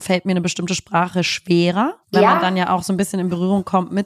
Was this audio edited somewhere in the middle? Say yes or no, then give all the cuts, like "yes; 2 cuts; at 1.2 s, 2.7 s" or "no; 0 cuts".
yes; 1 cut; at 2.0 s